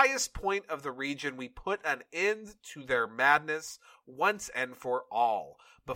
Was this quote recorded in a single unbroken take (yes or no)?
yes